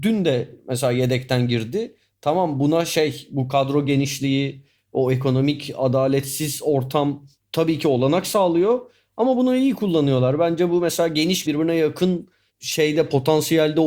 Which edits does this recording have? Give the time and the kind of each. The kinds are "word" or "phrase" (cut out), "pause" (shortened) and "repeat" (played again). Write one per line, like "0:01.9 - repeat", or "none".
0:11.5 - word